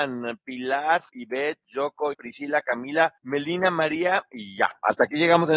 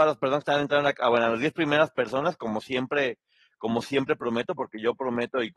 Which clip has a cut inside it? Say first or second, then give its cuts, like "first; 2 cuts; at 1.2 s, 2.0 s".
first; 3 cuts; at 1.1 s, 2.1 s, 3.2 s